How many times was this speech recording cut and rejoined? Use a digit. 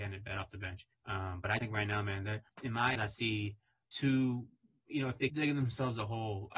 6